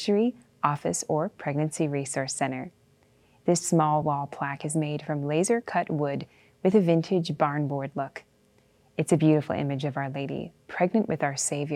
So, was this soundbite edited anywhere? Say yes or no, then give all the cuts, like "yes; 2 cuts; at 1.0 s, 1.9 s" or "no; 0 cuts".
no; 0 cuts